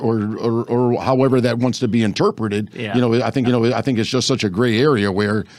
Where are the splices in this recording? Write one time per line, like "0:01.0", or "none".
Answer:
0:03.4